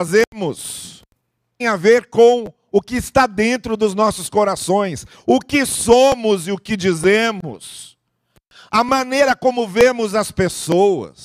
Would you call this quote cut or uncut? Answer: cut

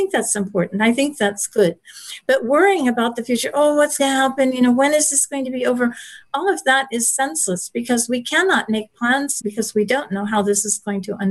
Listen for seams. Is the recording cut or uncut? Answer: cut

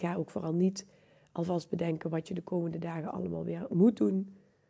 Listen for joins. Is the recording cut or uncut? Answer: uncut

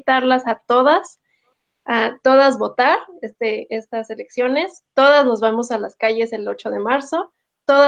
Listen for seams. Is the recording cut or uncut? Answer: uncut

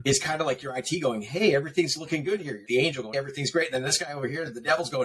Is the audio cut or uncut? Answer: cut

